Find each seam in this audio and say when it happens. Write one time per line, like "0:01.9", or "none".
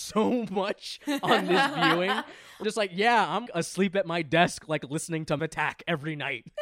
0:02.6
0:03.5
0:05.4